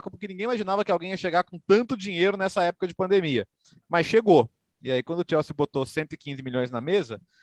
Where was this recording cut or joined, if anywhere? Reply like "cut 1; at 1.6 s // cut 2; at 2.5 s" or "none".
none